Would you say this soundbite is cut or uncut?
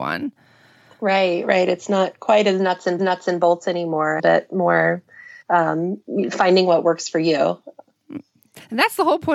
cut